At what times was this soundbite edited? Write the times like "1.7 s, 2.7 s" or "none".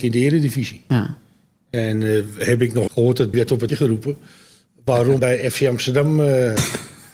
2.9 s, 3.3 s, 3.7 s, 5.2 s